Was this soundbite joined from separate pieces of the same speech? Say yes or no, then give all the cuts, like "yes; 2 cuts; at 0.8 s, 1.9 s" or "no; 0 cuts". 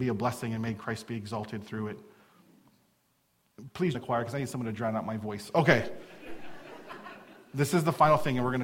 yes; 1 cut; at 3.9 s